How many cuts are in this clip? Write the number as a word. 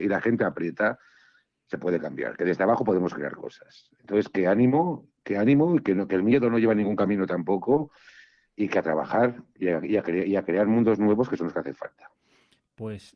zero